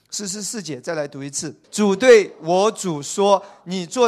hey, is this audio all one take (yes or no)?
no